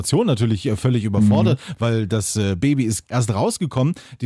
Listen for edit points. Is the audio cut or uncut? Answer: cut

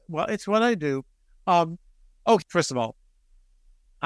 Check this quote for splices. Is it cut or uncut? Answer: cut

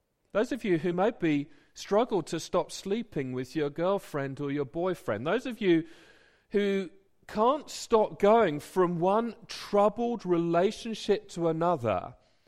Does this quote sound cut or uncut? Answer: uncut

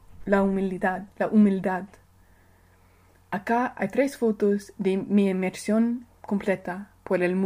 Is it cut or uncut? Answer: cut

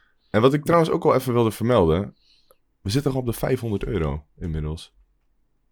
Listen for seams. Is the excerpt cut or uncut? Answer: uncut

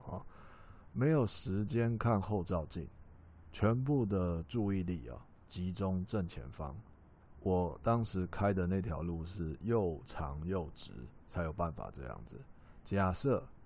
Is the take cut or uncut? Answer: cut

